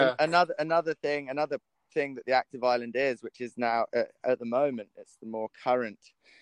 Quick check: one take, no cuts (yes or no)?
yes